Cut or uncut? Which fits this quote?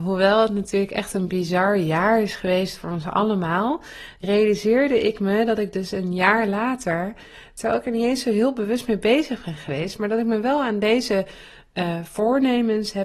uncut